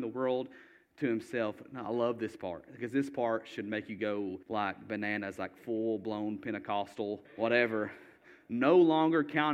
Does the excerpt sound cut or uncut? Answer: cut